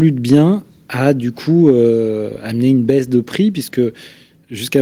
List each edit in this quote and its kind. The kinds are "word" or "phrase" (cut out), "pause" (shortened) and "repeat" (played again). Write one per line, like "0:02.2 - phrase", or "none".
none